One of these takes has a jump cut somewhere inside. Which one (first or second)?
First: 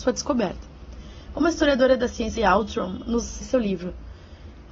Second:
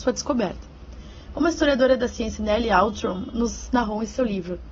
first